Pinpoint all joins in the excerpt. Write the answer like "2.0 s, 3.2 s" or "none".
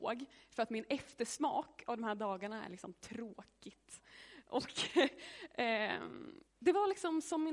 6.5 s